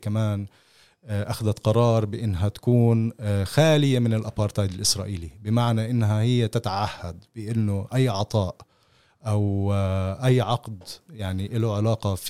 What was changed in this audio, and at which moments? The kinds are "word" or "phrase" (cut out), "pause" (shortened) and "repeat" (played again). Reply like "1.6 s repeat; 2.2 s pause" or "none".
none